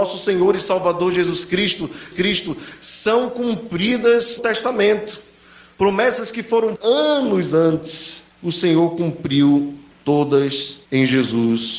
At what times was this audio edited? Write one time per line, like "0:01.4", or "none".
0:02.1
0:04.4
0:06.8
0:08.3
0:10.8